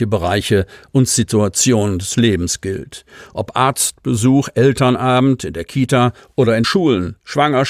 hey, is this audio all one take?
no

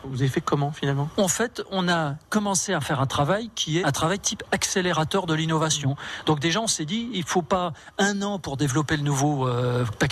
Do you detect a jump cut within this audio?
yes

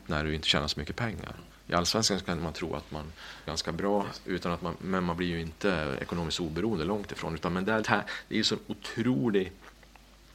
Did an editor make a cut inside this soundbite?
yes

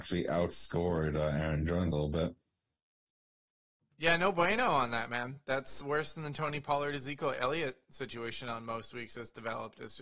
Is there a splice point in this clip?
yes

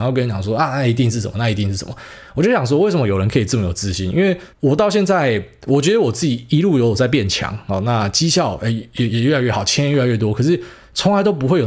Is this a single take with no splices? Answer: no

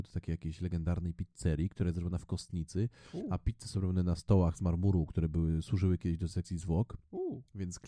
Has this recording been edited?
no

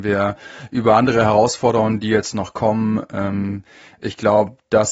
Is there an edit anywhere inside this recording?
no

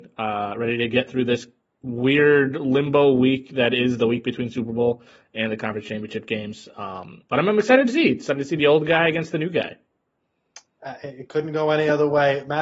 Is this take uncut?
yes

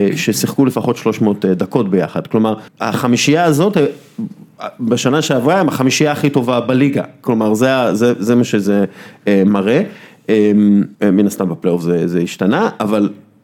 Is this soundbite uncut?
no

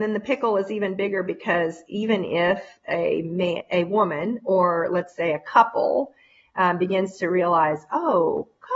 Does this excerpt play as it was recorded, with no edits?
yes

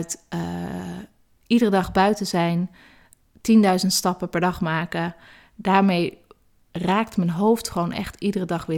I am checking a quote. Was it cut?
no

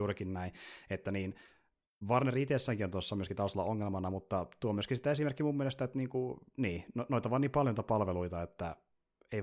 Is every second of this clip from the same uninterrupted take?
yes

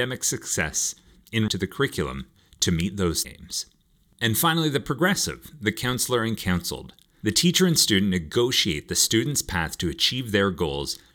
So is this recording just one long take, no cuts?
no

